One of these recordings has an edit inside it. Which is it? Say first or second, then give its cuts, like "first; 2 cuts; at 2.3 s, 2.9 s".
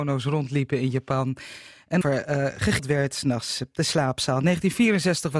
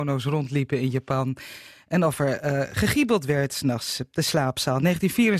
first; 2 cuts; at 2.0 s, 2.8 s